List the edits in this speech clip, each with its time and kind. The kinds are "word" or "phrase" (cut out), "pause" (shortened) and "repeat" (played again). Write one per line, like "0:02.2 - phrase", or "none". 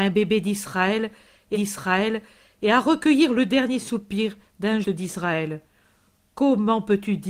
0:01.5 - repeat
0:04.8 - word